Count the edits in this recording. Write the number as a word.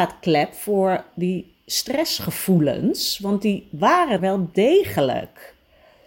one